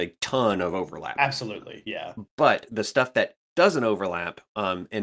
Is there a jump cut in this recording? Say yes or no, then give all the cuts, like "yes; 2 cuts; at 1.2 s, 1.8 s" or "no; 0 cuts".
yes; 1 cut; at 2.3 s